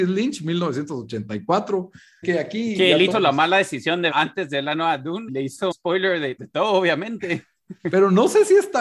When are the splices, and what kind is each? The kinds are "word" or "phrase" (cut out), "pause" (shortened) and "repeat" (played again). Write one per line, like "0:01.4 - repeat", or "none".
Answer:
0:02.2 - word
0:03.1 - word
0:04.1 - word
0:05.3 - word
0:05.7 - word
0:06.4 - word